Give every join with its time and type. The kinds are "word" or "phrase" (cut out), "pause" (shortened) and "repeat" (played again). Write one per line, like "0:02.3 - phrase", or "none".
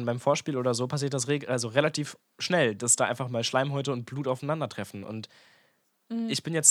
none